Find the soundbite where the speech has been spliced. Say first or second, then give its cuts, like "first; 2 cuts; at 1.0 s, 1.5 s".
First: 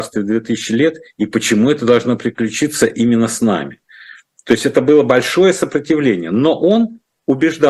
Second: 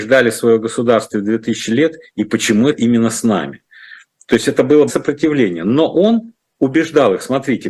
second; 2 cuts; at 2.7 s, 4.9 s